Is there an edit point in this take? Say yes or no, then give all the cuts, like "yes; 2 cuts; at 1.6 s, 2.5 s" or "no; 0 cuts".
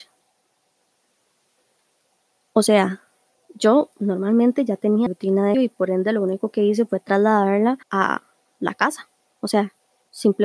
yes; 3 cuts; at 5.1 s, 5.5 s, 7.8 s